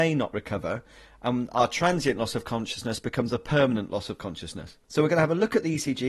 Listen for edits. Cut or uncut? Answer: uncut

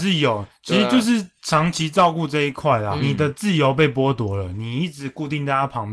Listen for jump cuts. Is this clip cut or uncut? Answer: cut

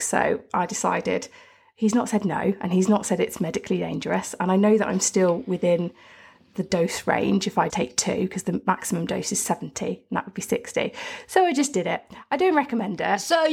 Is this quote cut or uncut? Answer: cut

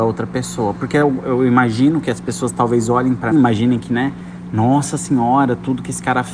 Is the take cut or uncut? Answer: cut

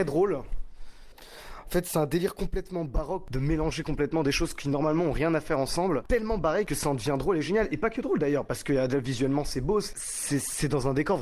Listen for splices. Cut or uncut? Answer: cut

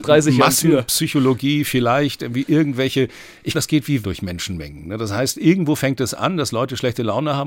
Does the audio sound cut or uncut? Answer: cut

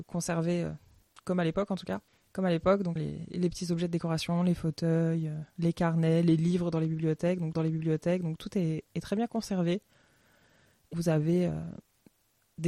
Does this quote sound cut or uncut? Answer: cut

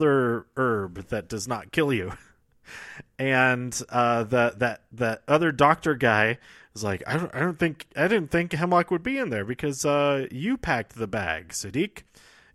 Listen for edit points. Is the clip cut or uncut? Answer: uncut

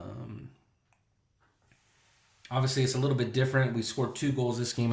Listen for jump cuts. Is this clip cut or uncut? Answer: uncut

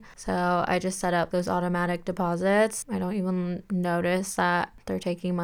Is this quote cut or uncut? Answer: cut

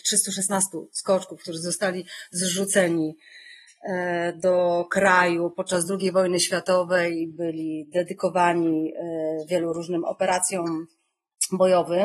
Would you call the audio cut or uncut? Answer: uncut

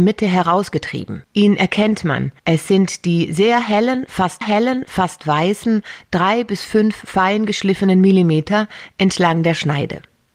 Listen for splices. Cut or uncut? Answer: cut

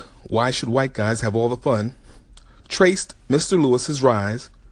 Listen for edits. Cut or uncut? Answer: uncut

